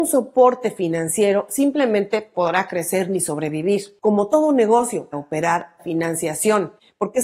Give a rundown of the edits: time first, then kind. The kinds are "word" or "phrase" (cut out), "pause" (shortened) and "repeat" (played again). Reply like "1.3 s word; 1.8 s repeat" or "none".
2.3 s word; 5.1 s word; 5.8 s phrase